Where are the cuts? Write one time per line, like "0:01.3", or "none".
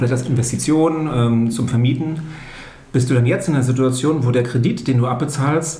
none